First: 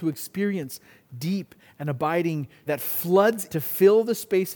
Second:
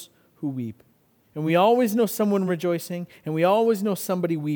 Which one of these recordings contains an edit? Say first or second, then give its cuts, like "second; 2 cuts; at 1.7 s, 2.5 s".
first; 2 cuts; at 2.7 s, 3.5 s